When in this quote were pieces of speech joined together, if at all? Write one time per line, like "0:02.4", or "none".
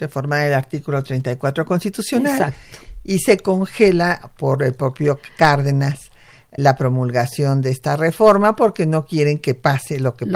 0:06.6